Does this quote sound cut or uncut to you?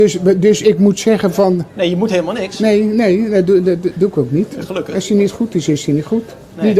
uncut